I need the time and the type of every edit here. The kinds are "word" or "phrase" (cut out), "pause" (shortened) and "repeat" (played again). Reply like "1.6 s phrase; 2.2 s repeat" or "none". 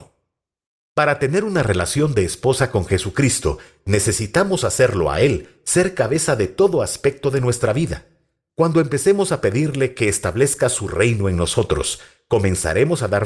none